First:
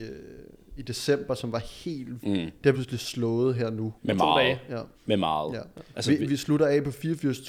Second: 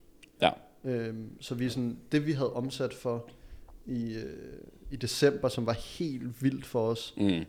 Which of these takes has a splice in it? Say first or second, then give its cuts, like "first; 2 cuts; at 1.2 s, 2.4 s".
first; 4 cuts; at 2.2 s, 2.7 s, 4.0 s, 4.9 s